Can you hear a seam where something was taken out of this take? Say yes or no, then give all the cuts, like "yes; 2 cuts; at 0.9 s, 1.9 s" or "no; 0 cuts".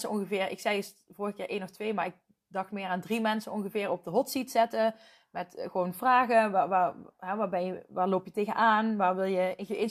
no; 0 cuts